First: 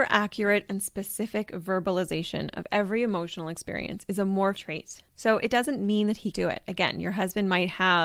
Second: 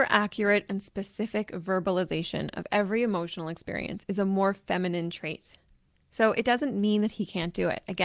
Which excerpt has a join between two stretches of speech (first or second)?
first